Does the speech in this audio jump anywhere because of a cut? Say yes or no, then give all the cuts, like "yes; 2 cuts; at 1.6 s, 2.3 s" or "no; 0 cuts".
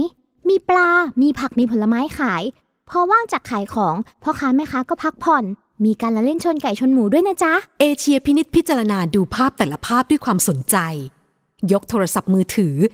no; 0 cuts